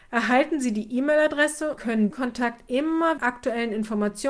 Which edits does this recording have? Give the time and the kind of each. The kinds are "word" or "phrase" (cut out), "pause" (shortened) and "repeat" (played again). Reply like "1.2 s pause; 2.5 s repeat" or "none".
1.8 s word; 2.1 s word; 3.2 s phrase